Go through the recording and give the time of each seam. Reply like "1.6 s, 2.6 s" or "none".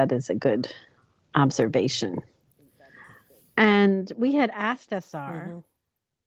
none